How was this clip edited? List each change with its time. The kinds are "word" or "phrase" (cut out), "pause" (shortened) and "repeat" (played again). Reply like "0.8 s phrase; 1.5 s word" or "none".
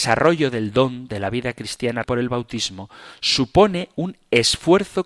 2.0 s word